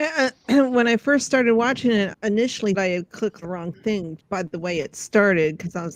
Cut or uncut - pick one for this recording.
cut